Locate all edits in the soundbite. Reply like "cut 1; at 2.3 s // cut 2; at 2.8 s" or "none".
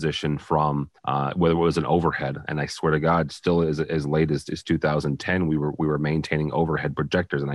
cut 1; at 1.0 s